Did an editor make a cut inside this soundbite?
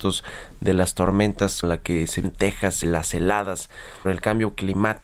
yes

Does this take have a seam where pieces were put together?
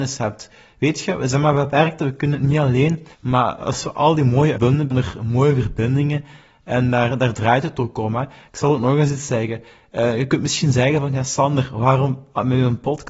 yes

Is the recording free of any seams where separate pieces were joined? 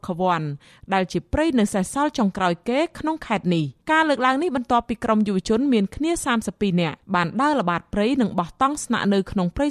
no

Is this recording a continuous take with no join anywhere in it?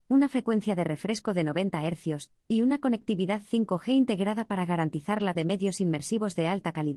no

